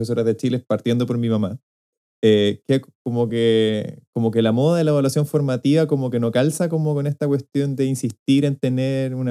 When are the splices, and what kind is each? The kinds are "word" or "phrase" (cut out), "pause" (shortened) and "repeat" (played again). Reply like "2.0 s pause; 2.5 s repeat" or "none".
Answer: none